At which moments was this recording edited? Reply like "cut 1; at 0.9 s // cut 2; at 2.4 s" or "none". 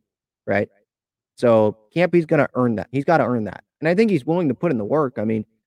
none